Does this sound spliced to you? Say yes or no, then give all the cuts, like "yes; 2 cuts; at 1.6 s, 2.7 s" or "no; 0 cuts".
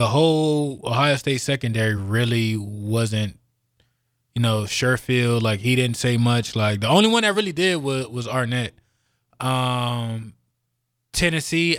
no; 0 cuts